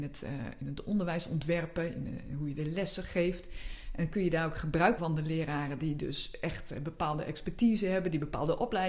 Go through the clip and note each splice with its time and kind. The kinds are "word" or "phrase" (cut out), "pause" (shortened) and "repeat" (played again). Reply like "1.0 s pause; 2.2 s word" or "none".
5.0 s word